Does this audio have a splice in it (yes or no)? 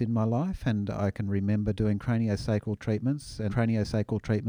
yes